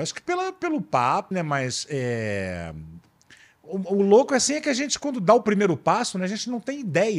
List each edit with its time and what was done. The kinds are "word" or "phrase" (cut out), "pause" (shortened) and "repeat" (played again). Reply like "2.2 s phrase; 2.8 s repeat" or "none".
1.3 s word